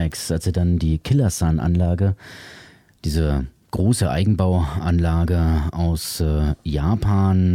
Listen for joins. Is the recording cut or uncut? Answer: uncut